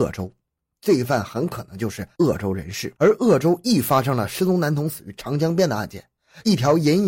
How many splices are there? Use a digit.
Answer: 1